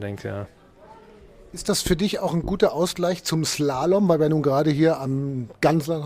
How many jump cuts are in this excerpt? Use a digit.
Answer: 0